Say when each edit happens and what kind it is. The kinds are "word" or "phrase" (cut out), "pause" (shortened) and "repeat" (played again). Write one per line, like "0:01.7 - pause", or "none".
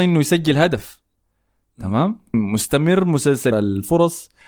0:02.3 - word
0:03.5 - word